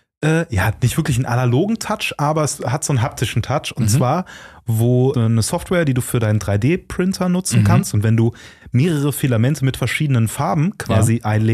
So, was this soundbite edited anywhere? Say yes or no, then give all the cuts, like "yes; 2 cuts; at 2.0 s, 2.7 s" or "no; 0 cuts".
yes; 1 cut; at 5.1 s